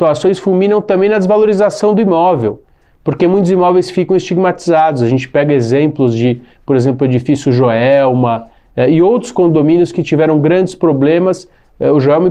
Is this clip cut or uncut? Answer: uncut